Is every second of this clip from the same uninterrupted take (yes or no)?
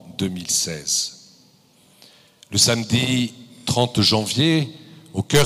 yes